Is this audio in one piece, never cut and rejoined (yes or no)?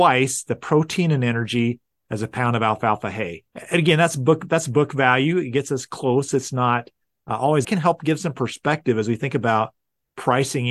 no